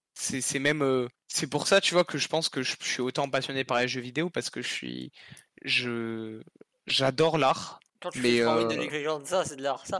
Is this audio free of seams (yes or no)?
no